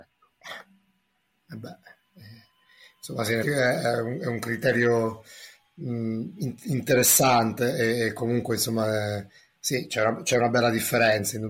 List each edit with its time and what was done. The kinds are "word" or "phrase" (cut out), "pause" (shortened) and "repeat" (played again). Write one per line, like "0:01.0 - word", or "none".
0:03.4 - word